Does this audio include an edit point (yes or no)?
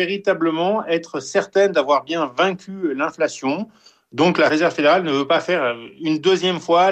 no